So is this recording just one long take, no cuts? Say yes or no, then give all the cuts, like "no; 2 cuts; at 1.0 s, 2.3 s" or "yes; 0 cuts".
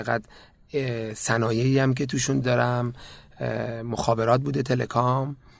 no; 1 cut; at 2.4 s